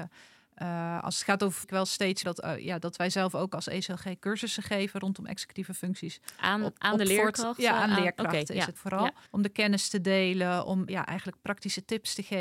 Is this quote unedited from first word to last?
no; 5 cuts; at 1.6 s, 2.2 s, 8.8 s, 9.3 s, 10.9 s

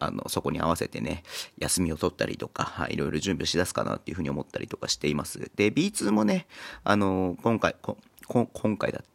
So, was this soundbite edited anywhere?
no; 0 cuts

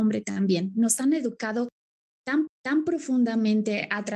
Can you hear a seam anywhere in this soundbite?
yes; 1 cut; at 2.5 s

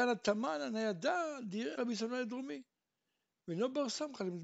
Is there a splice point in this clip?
yes; 1 cut; at 1.8 s

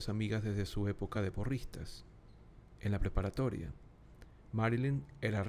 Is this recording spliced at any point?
no; 0 cuts

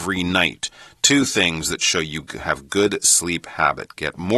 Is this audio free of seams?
yes; 0 cuts

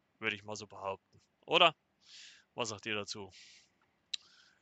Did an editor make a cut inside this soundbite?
no; 0 cuts

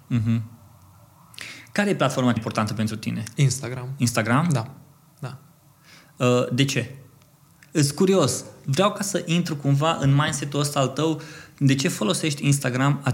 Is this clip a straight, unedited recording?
no; 1 cut; at 2.4 s

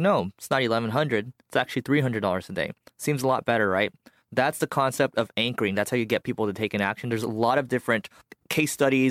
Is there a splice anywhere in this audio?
no; 0 cuts

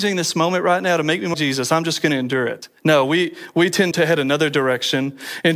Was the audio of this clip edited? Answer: yes; 3 cuts; at 1.3 s, 2.8 s, 3.9 s

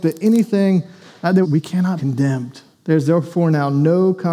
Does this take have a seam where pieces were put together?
yes; 3 cuts; at 1.4 s, 2.0 s, 2.7 s

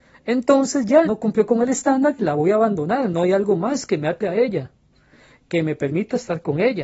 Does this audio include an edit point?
yes; 1 cut; at 1.0 s

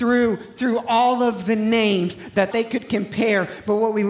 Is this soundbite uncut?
no; 1 cut; at 2.5 s

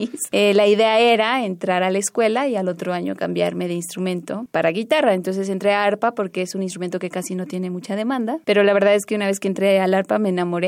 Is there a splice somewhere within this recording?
no; 0 cuts

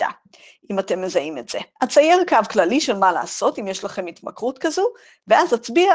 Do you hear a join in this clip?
yes; 1 cut; at 1.7 s

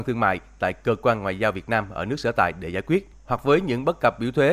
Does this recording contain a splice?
no; 0 cuts

